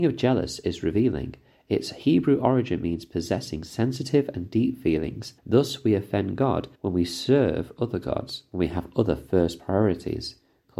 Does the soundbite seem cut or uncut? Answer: cut